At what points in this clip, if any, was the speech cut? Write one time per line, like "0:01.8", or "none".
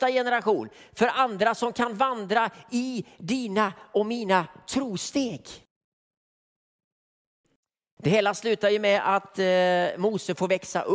none